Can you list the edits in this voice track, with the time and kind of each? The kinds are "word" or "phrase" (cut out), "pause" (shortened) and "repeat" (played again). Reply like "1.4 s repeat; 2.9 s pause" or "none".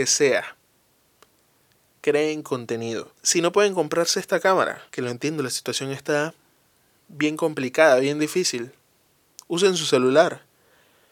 3.1 s pause; 4.9 s pause